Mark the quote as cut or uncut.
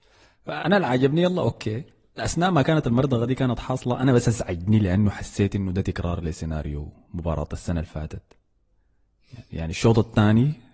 uncut